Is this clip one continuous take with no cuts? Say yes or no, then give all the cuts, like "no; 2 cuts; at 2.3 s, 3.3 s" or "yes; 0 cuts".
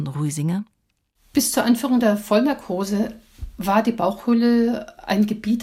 yes; 0 cuts